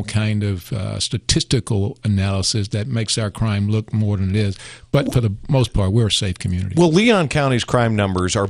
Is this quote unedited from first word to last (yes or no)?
yes